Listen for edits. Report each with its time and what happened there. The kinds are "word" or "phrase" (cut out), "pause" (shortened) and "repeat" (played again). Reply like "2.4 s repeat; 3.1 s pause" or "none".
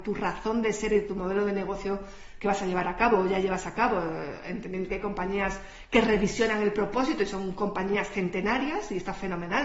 4.9 s word